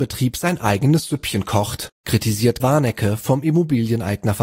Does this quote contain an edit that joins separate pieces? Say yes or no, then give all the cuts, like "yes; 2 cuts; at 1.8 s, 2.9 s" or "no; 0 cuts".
yes; 1 cut; at 2.6 s